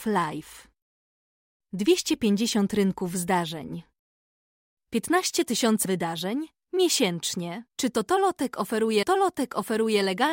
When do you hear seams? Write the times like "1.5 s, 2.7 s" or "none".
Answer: 5.8 s, 7.7 s, 9.0 s

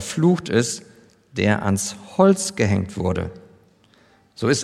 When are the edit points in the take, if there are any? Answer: none

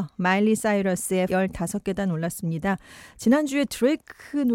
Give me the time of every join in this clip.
1.3 s

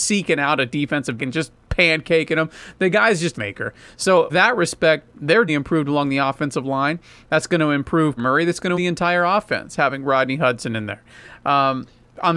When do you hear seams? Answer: 1.2 s, 3.3 s, 4.3 s, 5.5 s, 8.2 s, 8.7 s

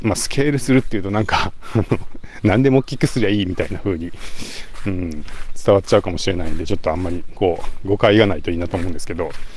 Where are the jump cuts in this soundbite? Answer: none

